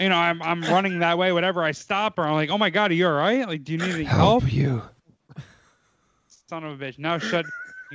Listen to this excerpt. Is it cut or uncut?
uncut